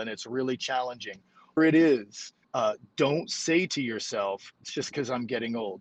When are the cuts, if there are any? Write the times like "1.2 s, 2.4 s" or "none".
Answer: 1.6 s, 2.4 s, 4.6 s